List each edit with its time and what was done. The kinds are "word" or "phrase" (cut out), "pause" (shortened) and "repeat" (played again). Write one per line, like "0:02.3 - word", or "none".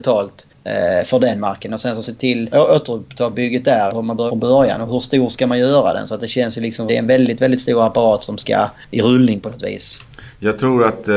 0:02.0 - phrase
0:02.5 - phrase
0:03.9 - word
0:04.3 - word
0:06.9 - word